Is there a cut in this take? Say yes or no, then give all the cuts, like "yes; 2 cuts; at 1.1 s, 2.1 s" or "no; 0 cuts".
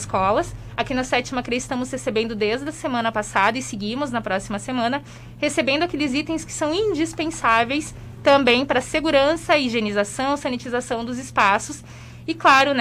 no; 0 cuts